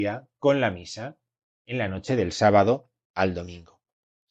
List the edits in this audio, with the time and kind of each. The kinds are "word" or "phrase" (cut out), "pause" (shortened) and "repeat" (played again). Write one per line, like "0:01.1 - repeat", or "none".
none